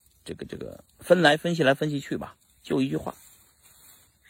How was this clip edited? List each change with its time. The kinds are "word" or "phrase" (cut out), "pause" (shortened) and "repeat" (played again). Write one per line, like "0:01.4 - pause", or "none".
none